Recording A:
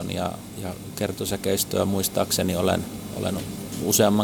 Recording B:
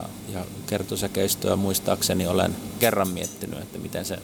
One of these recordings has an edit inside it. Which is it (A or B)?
B